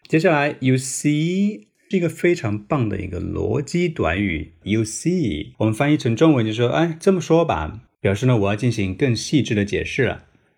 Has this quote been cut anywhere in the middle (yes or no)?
yes